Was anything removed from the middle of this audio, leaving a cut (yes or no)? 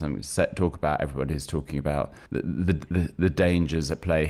yes